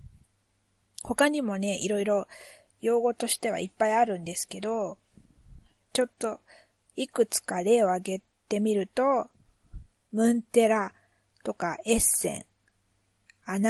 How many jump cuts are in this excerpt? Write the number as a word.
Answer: zero